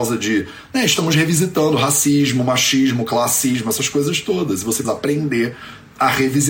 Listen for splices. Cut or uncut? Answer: cut